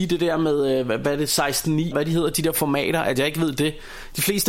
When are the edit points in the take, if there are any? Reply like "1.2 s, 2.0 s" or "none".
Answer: 1.9 s